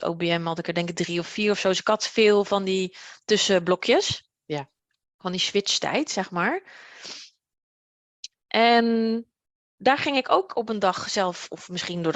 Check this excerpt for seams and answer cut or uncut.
uncut